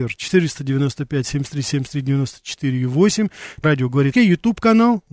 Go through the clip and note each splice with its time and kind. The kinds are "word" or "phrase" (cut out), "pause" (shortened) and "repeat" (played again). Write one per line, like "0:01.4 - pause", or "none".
0:03.6 - word
0:04.1 - word

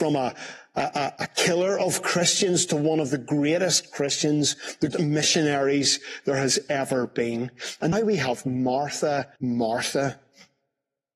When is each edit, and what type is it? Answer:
0:04.9 - word
0:07.9 - word
0:09.4 - pause

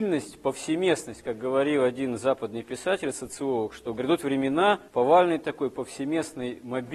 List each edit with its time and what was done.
0:04.9 - pause

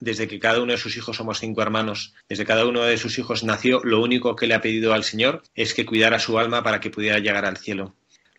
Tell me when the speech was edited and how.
0:02.2 - pause
0:05.5 - pause

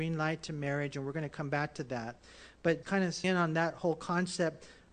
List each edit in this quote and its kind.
0:02.8 - word
0:03.2 - word

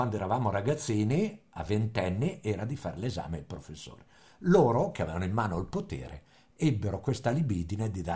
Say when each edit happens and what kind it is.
none

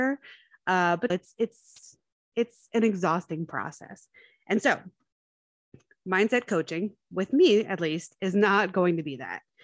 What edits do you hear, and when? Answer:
0:01.1 - word

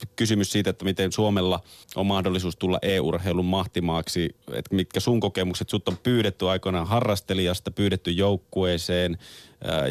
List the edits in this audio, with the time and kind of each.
0:01.8 - pause
0:04.4 - pause

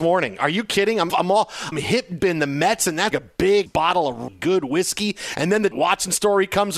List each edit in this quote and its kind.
0:01.1 - word
0:01.7 - word
0:02.2 - word
0:03.1 - word
0:03.7 - word
0:04.3 - word
0:05.7 - word

